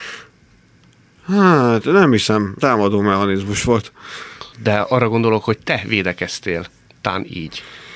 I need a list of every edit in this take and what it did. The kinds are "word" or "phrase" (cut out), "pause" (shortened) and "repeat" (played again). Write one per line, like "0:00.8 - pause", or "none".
0:02.6 - phrase
0:04.5 - pause